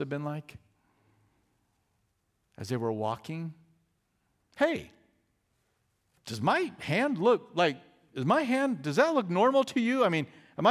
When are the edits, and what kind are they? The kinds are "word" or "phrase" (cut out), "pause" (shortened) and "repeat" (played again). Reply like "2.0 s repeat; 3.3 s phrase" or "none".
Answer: none